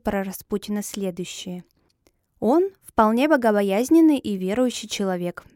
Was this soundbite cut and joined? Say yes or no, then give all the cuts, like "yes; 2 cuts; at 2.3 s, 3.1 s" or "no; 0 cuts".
no; 0 cuts